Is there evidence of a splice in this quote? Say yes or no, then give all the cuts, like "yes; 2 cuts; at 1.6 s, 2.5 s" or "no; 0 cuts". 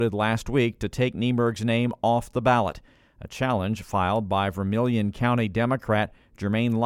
no; 0 cuts